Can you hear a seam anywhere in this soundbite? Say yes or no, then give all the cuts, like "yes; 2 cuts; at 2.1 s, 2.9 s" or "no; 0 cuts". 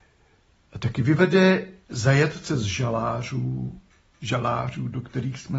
yes; 1 cut; at 4.1 s